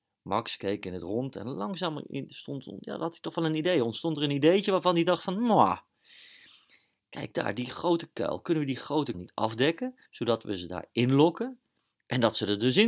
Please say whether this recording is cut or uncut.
cut